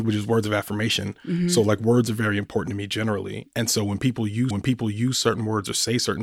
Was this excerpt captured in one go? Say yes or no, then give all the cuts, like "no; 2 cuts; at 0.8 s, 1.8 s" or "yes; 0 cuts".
no; 1 cut; at 4.5 s